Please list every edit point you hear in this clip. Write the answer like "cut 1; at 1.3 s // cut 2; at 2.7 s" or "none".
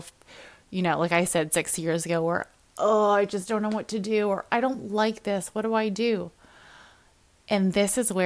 none